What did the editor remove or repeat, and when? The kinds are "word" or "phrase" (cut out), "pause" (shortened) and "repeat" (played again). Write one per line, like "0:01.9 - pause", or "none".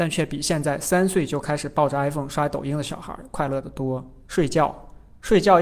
none